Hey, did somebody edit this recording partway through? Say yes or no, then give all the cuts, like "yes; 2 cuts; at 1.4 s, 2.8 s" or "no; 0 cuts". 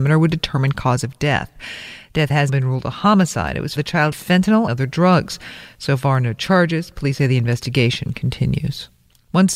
yes; 4 cuts; at 2.5 s, 3.8 s, 4.1 s, 4.7 s